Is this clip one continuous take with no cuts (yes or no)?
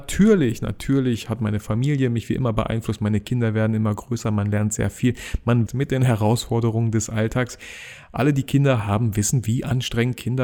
no